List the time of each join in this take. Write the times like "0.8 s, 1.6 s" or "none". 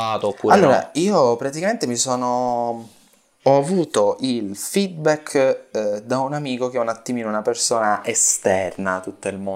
none